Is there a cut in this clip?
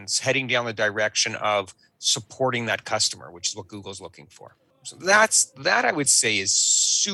no; 0 cuts

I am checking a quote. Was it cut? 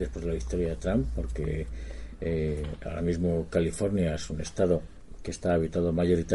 no; 0 cuts

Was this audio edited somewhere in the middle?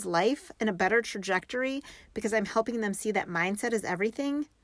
no; 0 cuts

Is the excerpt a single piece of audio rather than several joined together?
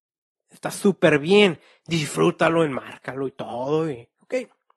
yes; 0 cuts

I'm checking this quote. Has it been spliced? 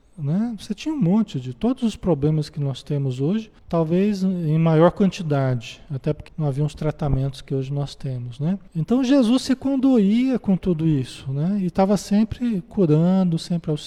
yes; 3 cuts; at 3.6 s, 6.3 s, 8.7 s

